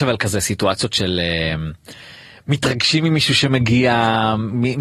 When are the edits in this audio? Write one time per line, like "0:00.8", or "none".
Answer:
none